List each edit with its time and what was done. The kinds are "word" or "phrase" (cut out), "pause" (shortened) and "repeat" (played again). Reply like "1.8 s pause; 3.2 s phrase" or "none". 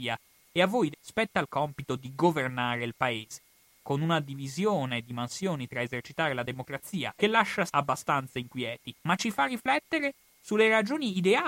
0.9 s word; 7.2 s phrase; 7.7 s word; 9.0 s pause